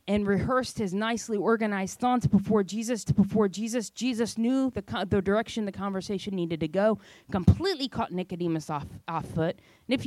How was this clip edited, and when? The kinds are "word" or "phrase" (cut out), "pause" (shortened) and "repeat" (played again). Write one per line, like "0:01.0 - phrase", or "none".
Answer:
0:03.1 - repeat